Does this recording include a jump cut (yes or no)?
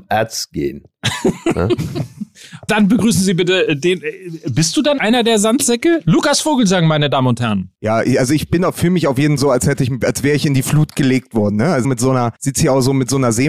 yes